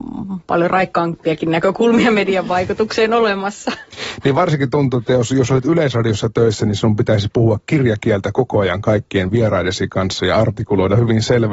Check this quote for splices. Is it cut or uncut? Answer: uncut